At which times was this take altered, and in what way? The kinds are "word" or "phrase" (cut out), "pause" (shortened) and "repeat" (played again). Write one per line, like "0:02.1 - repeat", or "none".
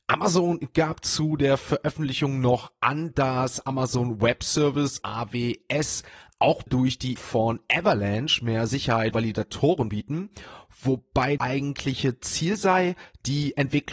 0:05.0 - word
0:06.7 - word
0:07.2 - word
0:09.1 - word
0:09.9 - word
0:11.4 - word